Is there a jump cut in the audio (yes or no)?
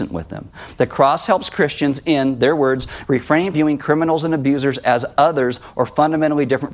yes